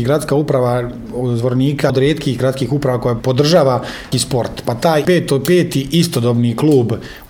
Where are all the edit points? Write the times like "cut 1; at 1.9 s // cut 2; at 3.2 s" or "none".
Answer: cut 1; at 1.9 s // cut 2; at 4.1 s // cut 3; at 5.0 s